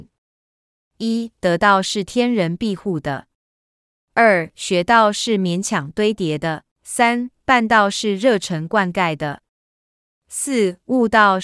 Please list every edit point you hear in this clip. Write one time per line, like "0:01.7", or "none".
0:06.7

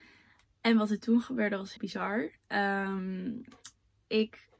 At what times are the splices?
0:01.8

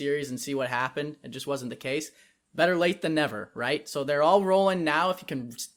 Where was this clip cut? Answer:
none

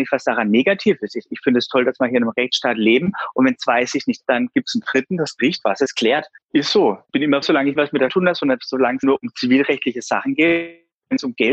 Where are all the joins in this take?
0:04.2
0:07.4
0:07.8
0:08.1
0:09.0

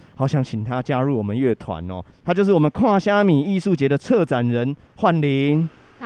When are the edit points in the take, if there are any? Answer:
none

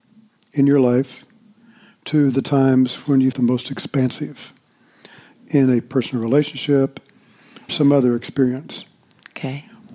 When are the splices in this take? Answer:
0:03.3
0:07.7

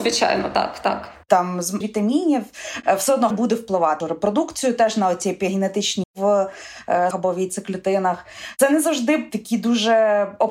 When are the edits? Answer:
0:01.8
0:03.3
0:04.0
0:06.0
0:07.1

